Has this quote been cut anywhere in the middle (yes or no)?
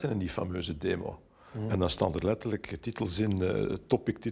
no